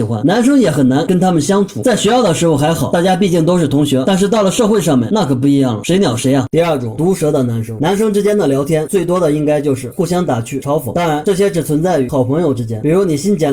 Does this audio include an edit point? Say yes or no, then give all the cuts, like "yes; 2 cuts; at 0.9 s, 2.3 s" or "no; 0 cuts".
no; 0 cuts